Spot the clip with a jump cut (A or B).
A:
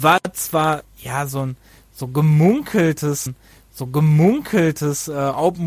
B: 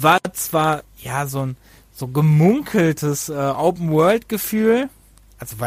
A